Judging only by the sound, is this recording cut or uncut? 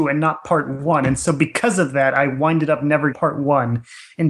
cut